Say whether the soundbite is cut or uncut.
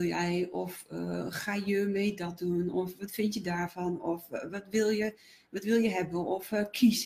uncut